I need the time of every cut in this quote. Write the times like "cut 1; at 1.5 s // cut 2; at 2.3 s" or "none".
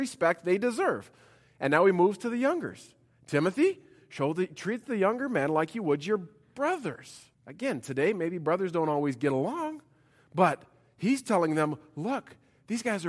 cut 1; at 7.3 s